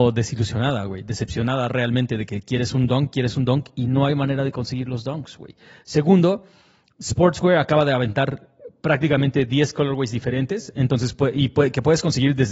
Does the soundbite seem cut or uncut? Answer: uncut